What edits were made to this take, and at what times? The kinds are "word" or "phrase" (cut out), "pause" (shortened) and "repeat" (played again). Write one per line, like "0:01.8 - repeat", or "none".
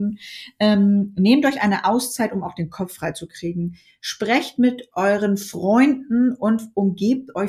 none